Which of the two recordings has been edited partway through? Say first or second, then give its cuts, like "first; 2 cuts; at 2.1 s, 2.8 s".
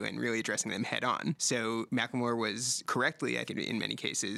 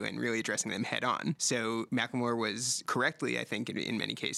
first; 1 cut; at 3.5 s